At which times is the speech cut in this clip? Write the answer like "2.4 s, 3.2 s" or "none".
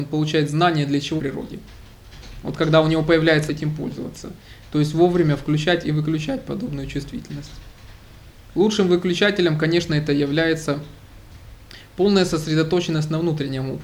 1.2 s, 3.5 s